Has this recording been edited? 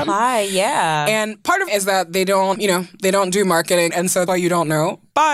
yes; 4 cuts; at 1.7 s, 2.5 s, 3.9 s, 4.3 s

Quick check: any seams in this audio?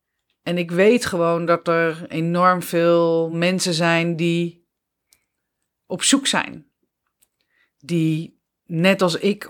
no; 0 cuts

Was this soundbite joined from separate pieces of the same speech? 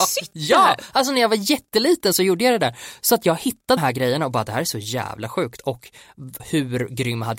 yes; 2 cuts; at 3.8 s, 6.4 s

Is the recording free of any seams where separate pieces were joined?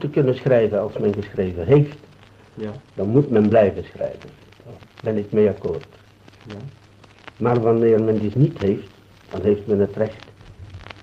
no; 2 cuts; at 7.3 s, 8.3 s

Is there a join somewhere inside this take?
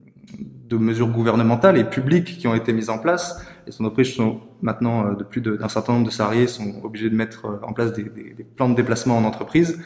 no; 0 cuts

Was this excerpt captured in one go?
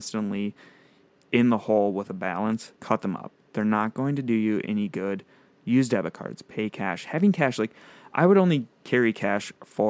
no; 1 cut; at 2.8 s

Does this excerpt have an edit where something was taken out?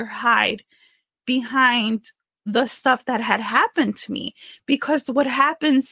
no; 0 cuts

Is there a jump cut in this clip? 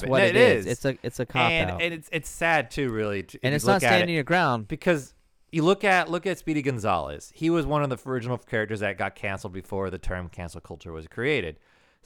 no; 0 cuts

